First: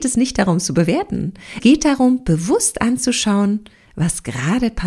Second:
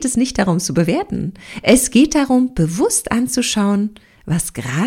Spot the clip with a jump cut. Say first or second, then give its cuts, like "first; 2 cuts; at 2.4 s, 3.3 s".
first; 1 cut; at 1.6 s